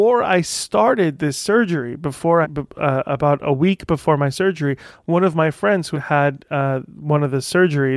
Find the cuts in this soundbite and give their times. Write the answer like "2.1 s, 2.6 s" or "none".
2.4 s, 5.9 s